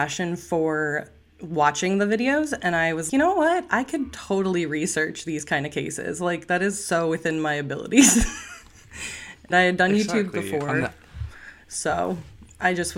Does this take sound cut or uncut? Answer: cut